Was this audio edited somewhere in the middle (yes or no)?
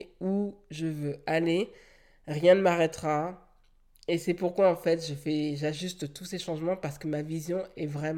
no